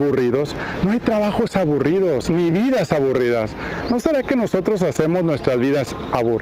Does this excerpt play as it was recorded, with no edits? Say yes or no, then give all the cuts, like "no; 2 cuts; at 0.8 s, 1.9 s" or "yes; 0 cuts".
yes; 0 cuts